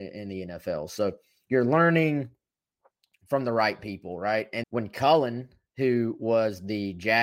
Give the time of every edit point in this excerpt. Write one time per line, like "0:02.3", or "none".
0:04.6